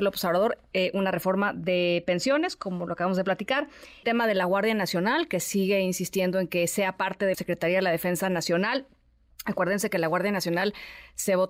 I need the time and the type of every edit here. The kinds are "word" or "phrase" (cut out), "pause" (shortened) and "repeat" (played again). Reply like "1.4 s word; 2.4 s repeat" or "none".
4.0 s word; 7.3 s word

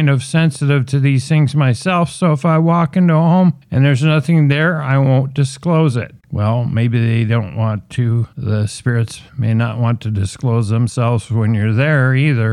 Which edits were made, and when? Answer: 3.6 s pause; 6.2 s pause; 8.3 s pause; 9.3 s pause

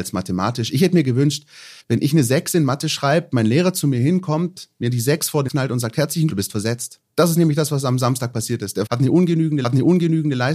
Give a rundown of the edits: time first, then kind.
1.8 s pause; 5.5 s word; 6.3 s word; 7.1 s pause; 8.9 s word; 9.6 s repeat

